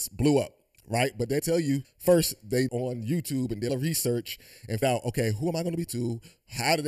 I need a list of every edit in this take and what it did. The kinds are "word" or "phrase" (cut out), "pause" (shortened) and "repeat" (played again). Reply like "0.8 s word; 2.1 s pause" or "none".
1.4 s word; 1.8 s word; 2.7 s word; 3.7 s word; 4.8 s word; 5.9 s word